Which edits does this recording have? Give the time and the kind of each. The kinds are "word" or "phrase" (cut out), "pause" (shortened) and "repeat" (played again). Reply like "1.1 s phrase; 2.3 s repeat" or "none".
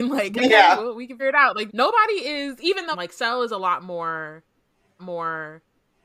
1.2 s word; 1.7 s word; 2.9 s word; 5.0 s repeat